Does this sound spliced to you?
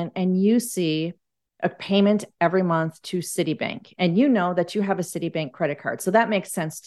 no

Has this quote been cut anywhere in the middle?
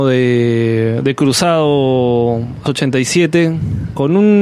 yes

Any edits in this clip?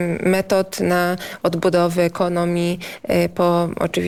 no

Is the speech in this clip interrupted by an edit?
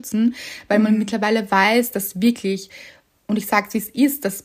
no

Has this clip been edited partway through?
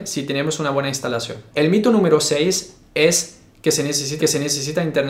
yes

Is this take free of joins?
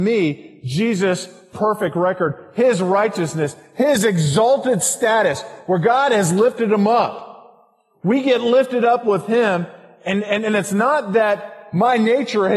yes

